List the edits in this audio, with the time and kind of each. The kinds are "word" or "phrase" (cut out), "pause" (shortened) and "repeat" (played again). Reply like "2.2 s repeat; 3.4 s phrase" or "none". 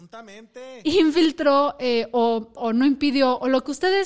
2.6 s word